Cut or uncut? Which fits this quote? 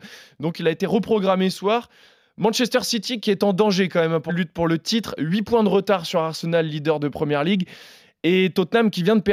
cut